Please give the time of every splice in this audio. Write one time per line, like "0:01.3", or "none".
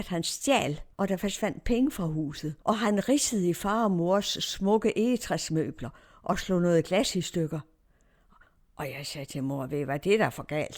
0:00.9
0:02.6